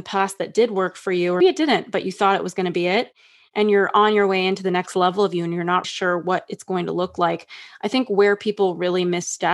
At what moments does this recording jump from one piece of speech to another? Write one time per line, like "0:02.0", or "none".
0:01.4
0:05.8